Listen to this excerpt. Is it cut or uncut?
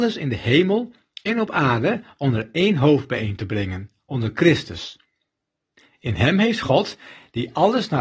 uncut